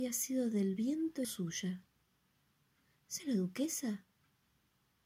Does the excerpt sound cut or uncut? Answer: cut